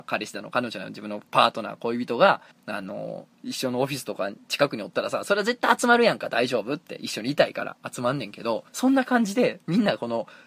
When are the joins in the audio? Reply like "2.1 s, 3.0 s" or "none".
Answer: 2.5 s, 3.3 s, 8.7 s